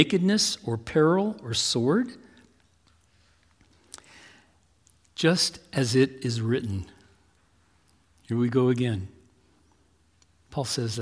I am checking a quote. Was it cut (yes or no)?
no